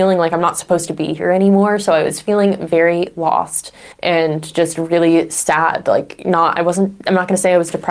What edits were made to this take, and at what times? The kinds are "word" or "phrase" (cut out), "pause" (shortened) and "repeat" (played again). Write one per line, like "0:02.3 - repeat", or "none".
0:03.9 - pause